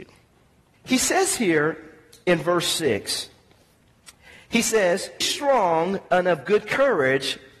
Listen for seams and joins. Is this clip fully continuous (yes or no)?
no